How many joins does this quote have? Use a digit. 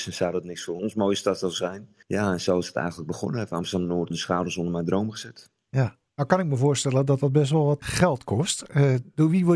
4